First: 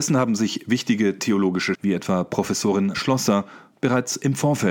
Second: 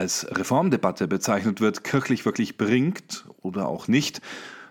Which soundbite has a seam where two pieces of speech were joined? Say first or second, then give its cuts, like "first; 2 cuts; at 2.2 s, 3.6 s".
first; 2 cuts; at 1.7 s, 2.9 s